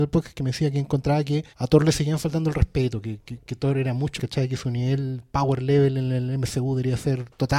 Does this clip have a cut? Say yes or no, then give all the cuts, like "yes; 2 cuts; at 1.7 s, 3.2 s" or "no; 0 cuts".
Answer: yes; 2 cuts; at 1.5 s, 4.2 s